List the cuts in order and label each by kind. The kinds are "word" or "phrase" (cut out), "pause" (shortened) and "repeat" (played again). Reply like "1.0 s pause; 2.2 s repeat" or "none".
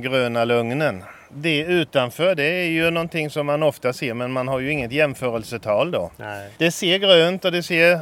6.6 s pause

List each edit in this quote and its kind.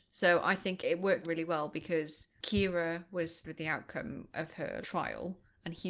1.2 s word; 3.4 s word; 4.8 s word

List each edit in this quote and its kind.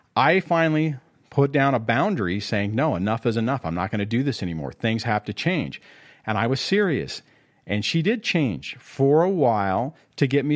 none

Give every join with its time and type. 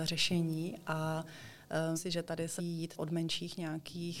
1.9 s word; 2.6 s word; 3.0 s word

